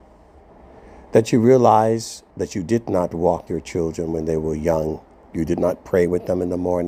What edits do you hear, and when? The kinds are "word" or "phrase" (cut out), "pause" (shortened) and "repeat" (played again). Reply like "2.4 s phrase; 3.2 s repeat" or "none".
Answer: 2.3 s pause; 3.5 s word